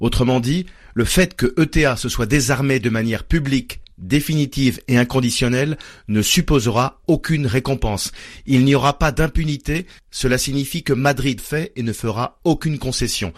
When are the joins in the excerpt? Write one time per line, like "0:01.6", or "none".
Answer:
0:11.4

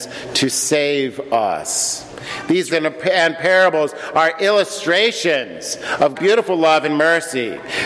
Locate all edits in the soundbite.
0:02.7
0:06.1

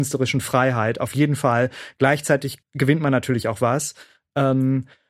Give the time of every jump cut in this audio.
0:02.6

